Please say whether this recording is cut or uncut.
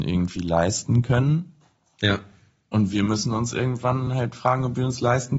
uncut